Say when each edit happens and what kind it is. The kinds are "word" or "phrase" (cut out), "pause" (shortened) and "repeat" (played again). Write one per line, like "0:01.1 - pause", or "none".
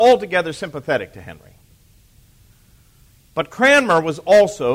none